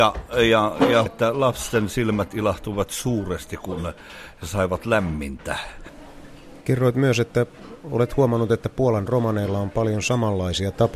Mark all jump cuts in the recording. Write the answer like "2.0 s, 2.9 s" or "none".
1.1 s